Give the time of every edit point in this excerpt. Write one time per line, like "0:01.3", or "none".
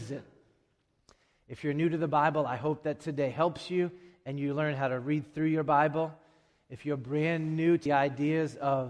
0:07.9